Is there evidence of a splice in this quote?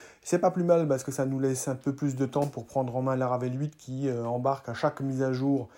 no; 0 cuts

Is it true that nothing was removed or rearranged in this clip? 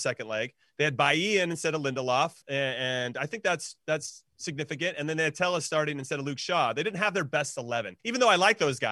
no; 2 cuts; at 2.4 s, 8.0 s

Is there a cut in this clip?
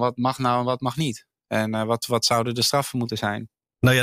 no; 0 cuts

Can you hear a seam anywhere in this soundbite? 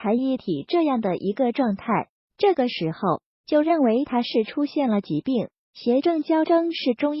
no; 0 cuts

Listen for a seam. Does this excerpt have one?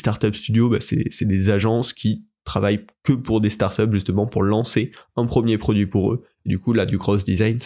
no; 0 cuts

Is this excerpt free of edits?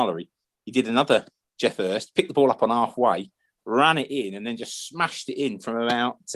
yes; 0 cuts

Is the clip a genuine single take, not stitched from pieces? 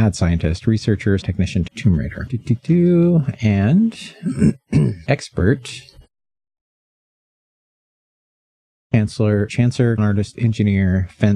no; 6 cuts; at 1.2 s, 1.7 s, 5.1 s, 9.5 s, 10.0 s, 10.3 s

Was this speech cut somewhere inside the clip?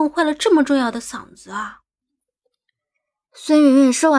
no; 0 cuts

